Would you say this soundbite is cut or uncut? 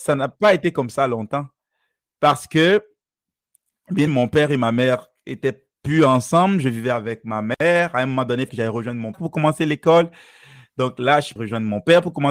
cut